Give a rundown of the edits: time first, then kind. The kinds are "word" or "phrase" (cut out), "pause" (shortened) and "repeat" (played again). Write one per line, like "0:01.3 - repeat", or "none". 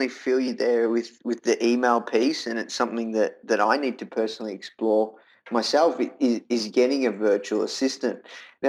none